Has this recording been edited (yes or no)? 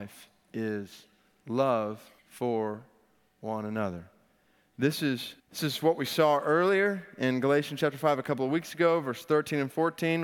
yes